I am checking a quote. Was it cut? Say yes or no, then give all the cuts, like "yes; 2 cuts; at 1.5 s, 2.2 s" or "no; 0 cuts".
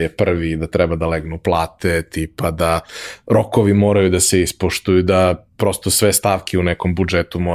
no; 0 cuts